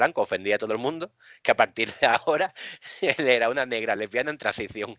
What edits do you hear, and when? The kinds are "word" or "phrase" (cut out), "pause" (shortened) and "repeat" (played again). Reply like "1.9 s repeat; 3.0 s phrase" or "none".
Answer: none